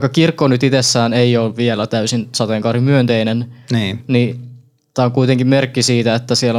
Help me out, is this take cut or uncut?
uncut